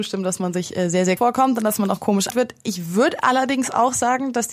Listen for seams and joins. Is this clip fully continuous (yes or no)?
no